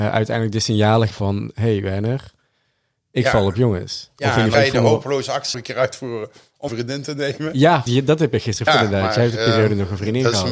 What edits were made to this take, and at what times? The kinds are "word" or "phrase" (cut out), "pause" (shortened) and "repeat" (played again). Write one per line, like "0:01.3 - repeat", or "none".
0:01.1 - word
0:04.5 - word
0:05.5 - word
0:06.7 - word
0:07.9 - word
0:08.7 - word